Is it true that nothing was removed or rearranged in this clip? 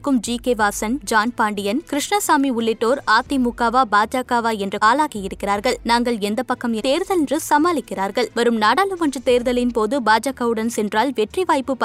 no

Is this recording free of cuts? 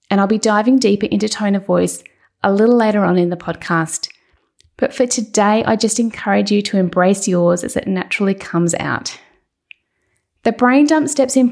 yes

